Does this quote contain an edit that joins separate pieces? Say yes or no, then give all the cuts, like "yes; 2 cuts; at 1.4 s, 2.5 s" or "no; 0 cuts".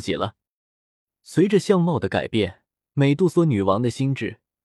no; 0 cuts